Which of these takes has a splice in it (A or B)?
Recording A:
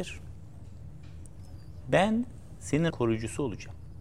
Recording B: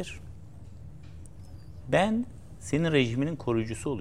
A